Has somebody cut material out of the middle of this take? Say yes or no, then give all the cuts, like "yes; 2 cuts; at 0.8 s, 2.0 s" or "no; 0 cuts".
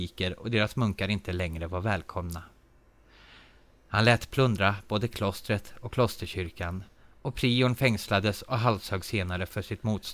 no; 0 cuts